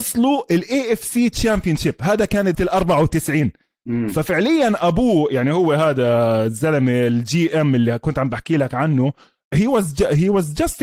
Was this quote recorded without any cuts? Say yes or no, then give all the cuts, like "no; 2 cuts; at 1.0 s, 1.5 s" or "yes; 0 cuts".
no; 1 cut; at 2.5 s